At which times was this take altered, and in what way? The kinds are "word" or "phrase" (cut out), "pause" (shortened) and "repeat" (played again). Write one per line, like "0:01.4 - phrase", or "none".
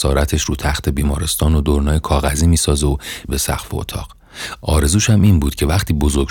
0:03.3 - word